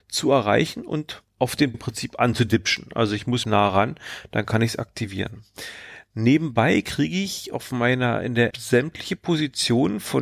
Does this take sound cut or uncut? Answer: cut